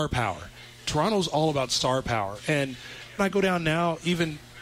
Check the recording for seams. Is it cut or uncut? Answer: cut